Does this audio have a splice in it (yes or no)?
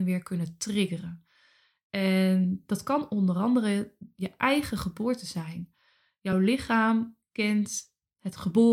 no